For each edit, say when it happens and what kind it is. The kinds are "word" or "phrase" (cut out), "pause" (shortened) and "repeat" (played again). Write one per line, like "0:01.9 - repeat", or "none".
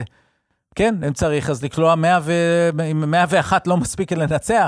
none